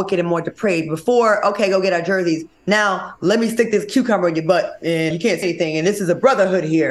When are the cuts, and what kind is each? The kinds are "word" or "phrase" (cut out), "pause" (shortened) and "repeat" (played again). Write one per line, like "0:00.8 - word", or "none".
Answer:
0:05.1 - word
0:05.4 - word